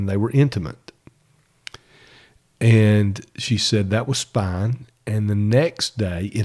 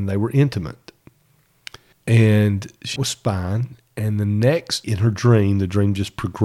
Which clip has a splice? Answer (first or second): second